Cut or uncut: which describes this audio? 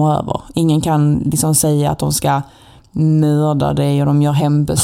uncut